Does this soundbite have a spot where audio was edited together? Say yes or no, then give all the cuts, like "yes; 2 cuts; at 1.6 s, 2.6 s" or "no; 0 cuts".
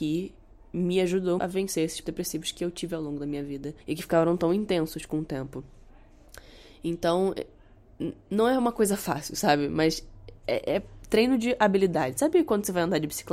yes; 3 cuts; at 1.4 s, 2.0 s, 3.8 s